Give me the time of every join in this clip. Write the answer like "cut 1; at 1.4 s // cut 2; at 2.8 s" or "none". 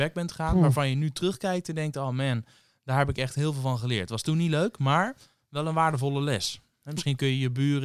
none